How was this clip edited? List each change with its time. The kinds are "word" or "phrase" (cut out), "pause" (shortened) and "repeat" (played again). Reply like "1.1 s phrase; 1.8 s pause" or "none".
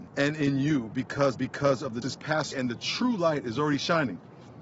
1.3 s repeat; 2.0 s word; 2.5 s word